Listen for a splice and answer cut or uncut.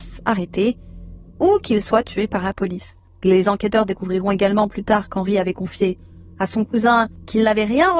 uncut